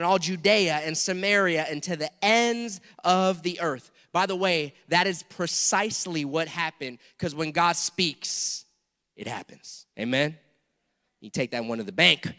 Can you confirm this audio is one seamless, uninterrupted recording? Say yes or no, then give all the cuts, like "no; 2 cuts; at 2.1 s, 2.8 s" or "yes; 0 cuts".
yes; 0 cuts